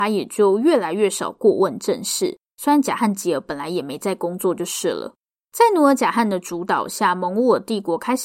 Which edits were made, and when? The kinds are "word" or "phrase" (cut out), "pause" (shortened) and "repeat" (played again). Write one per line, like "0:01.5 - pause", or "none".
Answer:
none